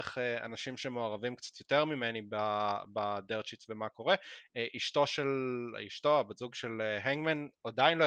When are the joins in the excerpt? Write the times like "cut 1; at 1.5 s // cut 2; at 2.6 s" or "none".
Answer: none